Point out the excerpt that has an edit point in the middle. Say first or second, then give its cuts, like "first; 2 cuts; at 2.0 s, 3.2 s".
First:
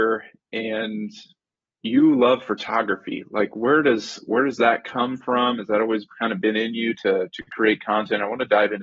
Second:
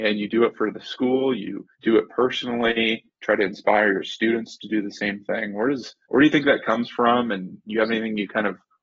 second; 2 cuts; at 1.7 s, 6.0 s